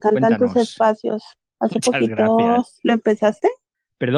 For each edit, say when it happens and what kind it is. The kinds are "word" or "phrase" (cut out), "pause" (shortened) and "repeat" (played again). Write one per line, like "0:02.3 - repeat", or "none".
none